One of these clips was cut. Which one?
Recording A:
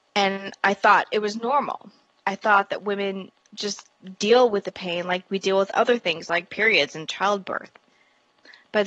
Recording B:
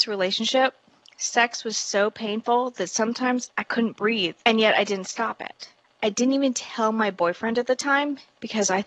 B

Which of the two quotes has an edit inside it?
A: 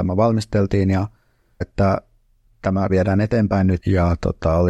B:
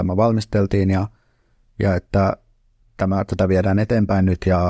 A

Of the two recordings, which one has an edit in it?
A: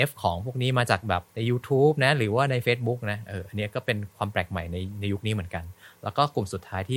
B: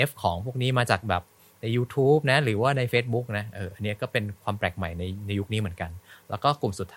A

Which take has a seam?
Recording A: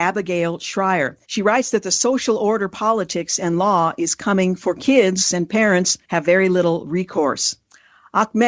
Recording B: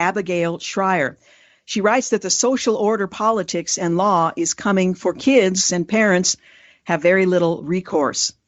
A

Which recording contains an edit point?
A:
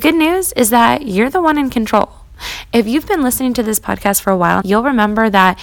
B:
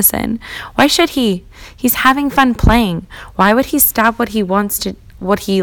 A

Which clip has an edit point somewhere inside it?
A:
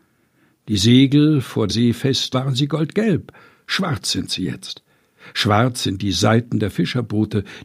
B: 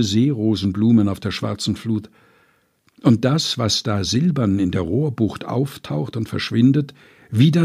A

